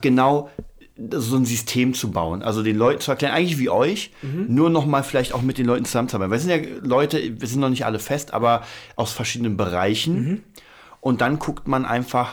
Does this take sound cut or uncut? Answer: uncut